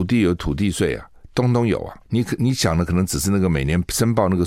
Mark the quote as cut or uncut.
cut